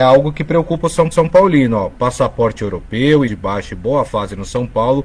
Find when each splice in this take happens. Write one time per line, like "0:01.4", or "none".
0:01.1
0:03.3